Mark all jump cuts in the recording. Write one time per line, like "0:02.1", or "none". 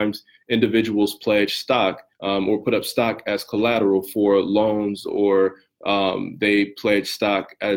0:02.1